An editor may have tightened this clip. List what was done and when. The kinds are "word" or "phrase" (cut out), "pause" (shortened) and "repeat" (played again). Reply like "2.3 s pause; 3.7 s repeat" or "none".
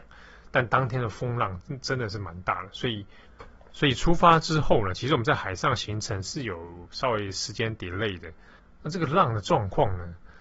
none